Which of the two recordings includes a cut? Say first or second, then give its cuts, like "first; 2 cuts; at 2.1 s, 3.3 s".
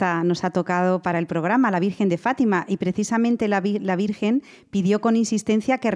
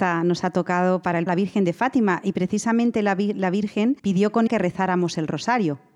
second; 3 cuts; at 1.3 s, 4.0 s, 4.5 s